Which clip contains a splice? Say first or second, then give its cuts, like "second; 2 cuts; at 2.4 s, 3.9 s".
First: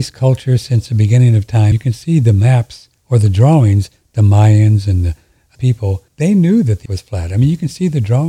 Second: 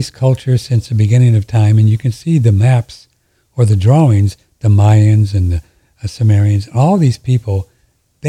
first; 5 cuts; at 1.7 s, 3.0 s, 5.5 s, 6.1 s, 6.9 s